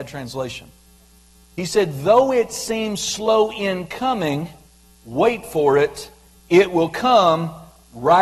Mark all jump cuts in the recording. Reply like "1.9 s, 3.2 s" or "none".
none